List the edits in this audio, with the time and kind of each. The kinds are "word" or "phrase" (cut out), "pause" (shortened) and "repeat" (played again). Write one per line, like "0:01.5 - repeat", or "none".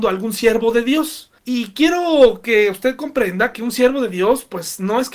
0:01.4 - pause